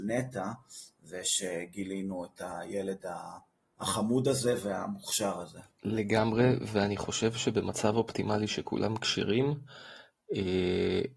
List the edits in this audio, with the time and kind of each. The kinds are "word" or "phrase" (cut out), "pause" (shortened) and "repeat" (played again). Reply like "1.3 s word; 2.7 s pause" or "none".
5.7 s pause